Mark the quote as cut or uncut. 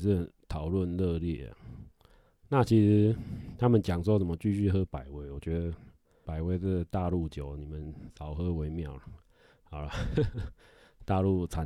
cut